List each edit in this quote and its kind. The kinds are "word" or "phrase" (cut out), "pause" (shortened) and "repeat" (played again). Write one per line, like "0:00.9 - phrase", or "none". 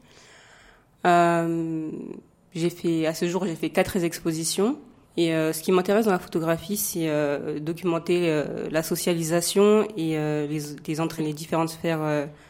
0:05.0 - pause
0:11.2 - word